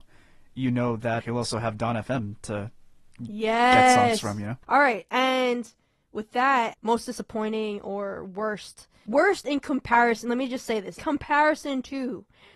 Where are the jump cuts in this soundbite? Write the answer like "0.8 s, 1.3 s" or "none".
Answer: 1.2 s, 6.7 s, 11.0 s